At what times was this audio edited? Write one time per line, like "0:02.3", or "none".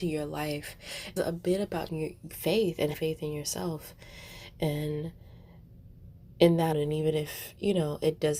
0:01.2
0:01.9
0:02.9
0:06.7